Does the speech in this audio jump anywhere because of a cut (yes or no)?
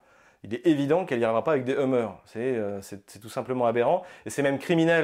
no